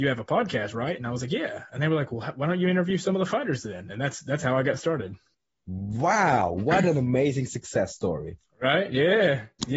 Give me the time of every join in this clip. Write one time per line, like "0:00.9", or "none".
0:05.3